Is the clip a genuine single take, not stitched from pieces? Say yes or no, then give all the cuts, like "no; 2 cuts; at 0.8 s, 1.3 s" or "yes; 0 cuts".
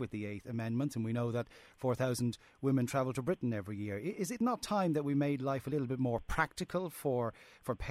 yes; 0 cuts